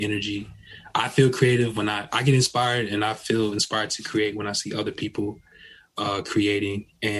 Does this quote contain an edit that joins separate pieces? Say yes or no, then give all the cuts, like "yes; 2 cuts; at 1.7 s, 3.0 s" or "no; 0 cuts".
no; 0 cuts